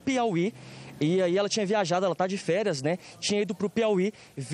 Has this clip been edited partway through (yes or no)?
no